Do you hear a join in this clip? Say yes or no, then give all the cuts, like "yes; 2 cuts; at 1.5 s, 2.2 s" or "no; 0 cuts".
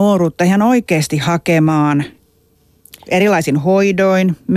no; 0 cuts